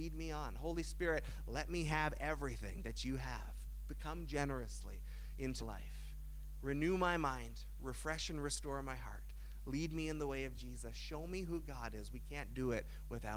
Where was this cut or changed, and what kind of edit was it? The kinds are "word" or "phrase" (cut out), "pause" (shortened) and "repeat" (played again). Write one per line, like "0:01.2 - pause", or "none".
0:05.6 - word